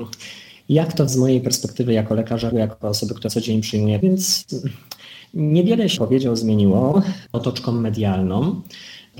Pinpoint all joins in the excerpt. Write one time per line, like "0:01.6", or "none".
0:01.1
0:02.5
0:03.3
0:04.0
0:06.0
0:07.3

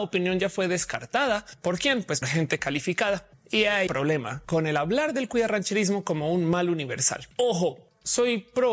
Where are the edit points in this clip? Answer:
0:02.2
0:03.9

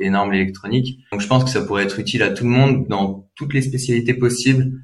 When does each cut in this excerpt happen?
0:01.1

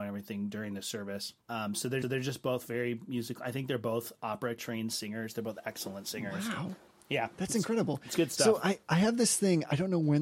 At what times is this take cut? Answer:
0:01.4
0:02.0
0:08.8

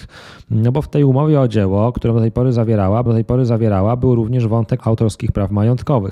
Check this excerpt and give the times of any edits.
0:03.1
0:04.8

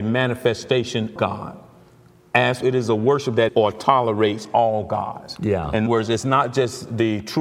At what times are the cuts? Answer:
0:01.2
0:02.6
0:03.5
0:05.9

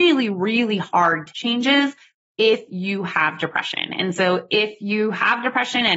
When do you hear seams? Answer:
0:01.3

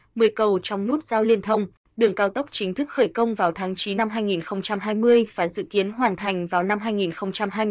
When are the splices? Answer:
0:04.0

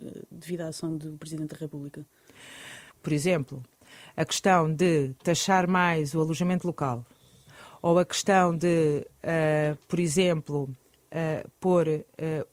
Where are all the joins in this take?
none

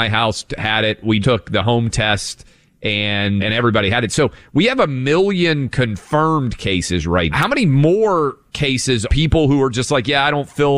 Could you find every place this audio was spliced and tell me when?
0:01.2
0:03.4
0:07.3
0:09.1

